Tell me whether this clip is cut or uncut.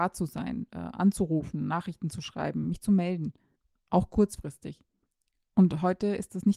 uncut